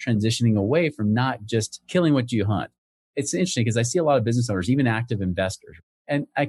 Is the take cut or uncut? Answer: uncut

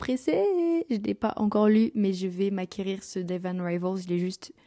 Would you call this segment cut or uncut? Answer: uncut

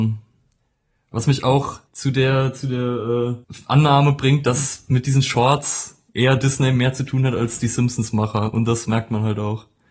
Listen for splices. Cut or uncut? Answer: cut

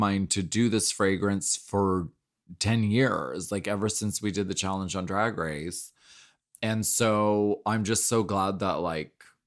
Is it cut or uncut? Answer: uncut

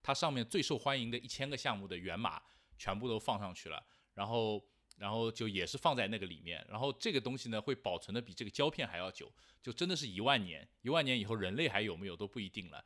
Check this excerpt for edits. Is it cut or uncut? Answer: uncut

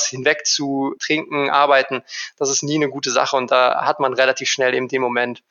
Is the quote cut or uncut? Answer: uncut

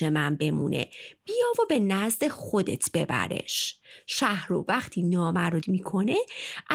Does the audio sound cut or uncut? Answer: cut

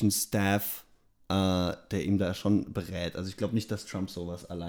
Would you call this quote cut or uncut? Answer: uncut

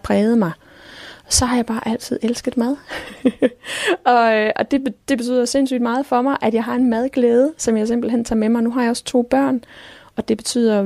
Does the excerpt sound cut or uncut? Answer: uncut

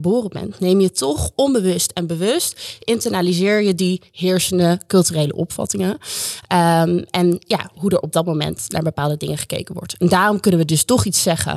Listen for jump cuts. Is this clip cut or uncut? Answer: uncut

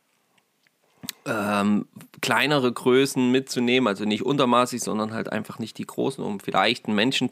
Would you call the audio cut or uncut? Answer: uncut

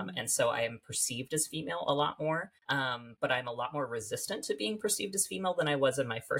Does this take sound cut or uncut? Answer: cut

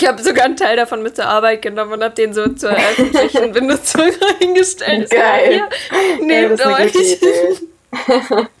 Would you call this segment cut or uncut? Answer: uncut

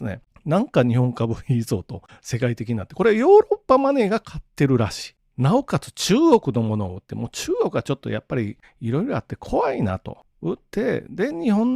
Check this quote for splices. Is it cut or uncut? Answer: uncut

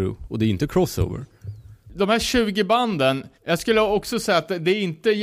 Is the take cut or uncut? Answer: cut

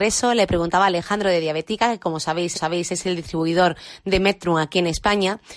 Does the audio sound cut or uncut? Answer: cut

